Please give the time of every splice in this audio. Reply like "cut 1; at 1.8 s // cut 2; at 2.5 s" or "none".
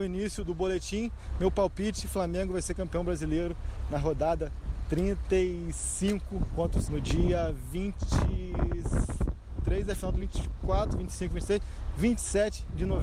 cut 1; at 6.8 s // cut 2; at 10.2 s